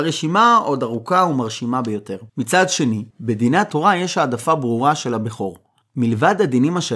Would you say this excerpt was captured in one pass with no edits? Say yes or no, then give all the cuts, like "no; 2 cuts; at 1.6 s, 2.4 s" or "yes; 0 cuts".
no; 2 cuts; at 2.3 s, 3.1 s